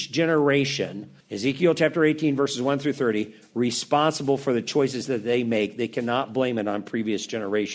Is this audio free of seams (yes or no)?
no